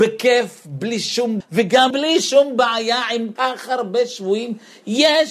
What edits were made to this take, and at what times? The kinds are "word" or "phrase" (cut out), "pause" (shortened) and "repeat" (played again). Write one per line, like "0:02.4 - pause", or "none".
0:01.4 - word
0:01.9 - word
0:03.4 - word